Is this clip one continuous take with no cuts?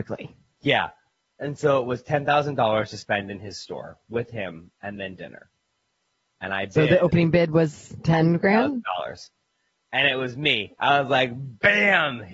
yes; 0 cuts

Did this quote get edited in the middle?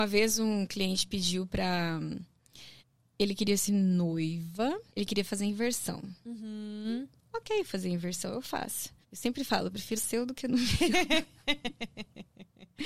yes; 5 cuts; at 2.8 s, 3.7 s, 4.9 s, 9.0 s, 10.0 s

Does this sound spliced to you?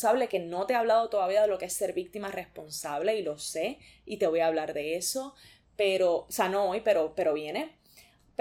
no; 0 cuts

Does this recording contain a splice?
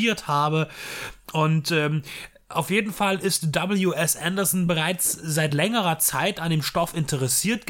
no; 0 cuts

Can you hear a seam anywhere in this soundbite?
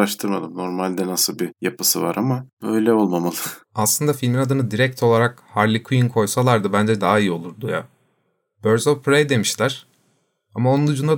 yes; 1 cut; at 3.6 s

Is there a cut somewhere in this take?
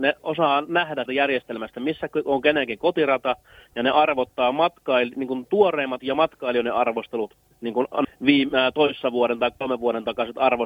yes; 3 cuts; at 1.1 s, 6.0 s, 8.0 s

